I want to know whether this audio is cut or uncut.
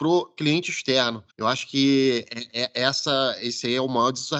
cut